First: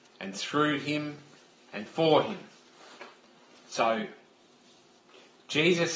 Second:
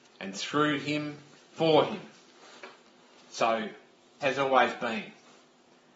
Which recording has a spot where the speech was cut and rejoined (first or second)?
second